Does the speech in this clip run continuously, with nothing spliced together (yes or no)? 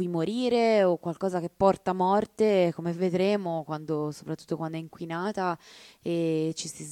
yes